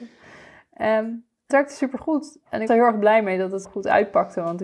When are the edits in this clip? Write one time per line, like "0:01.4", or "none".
0:01.5
0:02.7
0:03.6